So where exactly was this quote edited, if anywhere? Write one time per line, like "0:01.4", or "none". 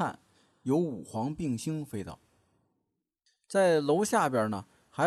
none